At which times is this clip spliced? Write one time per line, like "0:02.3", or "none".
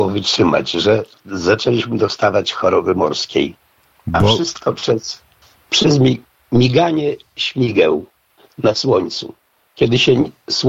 none